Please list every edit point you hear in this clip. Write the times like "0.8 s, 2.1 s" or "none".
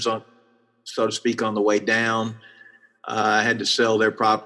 none